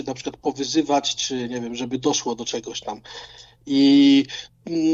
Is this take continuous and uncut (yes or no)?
yes